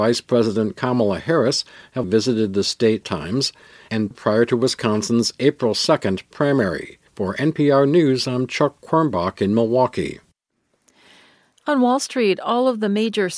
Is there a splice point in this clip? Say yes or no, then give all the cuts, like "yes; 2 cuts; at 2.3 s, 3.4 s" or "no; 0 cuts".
yes; 4 cuts; at 2.0 s, 3.0 s, 4.1 s, 7.1 s